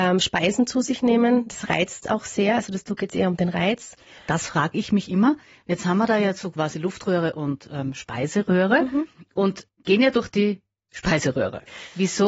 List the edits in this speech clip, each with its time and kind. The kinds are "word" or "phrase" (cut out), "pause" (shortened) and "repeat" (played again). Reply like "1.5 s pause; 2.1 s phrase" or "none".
9.7 s phrase